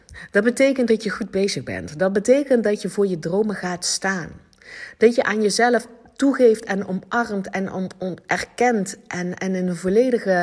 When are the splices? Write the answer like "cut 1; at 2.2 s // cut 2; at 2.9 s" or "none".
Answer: none